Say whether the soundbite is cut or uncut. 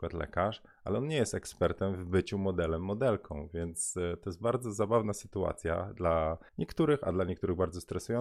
cut